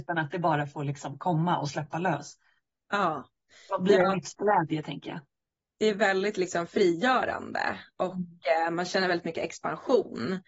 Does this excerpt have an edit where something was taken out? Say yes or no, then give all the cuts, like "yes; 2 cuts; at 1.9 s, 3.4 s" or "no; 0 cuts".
no; 0 cuts